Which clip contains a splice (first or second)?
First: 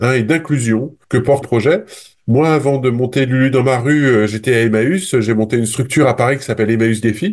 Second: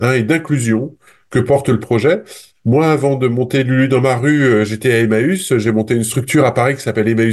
first